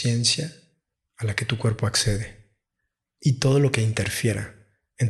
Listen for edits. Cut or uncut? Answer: uncut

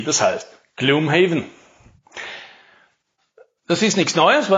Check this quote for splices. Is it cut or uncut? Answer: uncut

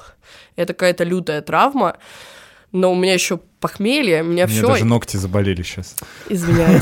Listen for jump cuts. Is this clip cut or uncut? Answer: uncut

